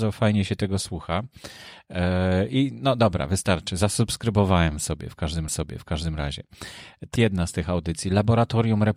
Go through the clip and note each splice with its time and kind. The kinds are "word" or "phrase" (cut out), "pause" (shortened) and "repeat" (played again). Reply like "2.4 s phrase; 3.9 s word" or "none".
5.5 s repeat; 7.1 s word